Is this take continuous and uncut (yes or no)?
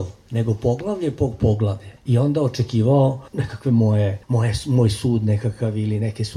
no